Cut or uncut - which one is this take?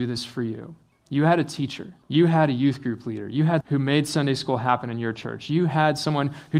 cut